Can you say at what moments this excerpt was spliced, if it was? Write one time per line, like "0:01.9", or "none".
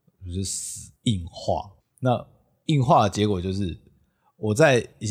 0:01.0